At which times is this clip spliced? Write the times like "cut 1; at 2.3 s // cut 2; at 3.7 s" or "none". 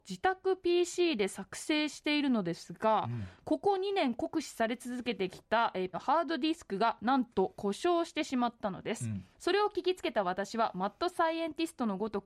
cut 1; at 5.9 s // cut 2; at 9.3 s